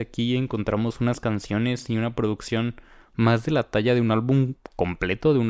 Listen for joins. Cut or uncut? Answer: uncut